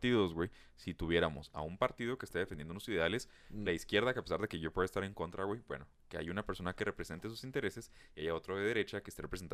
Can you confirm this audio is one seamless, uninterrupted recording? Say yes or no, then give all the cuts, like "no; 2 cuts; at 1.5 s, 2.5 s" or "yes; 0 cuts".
yes; 0 cuts